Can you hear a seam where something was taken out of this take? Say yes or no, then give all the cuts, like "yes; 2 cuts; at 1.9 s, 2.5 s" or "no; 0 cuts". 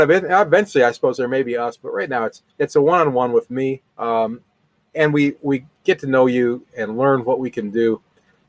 yes; 2 cuts; at 2.5 s, 3.9 s